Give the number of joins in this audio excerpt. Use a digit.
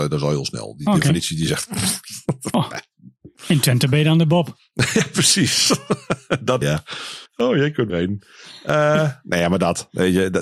4